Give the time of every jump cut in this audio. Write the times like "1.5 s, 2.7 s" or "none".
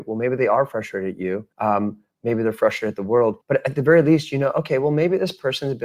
1.5 s, 3.4 s